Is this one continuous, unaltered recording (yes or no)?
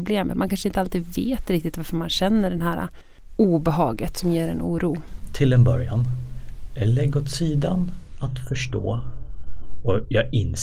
yes